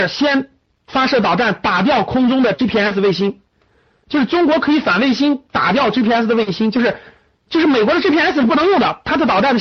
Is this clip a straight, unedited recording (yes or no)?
yes